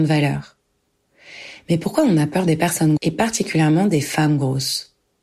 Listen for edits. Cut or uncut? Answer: cut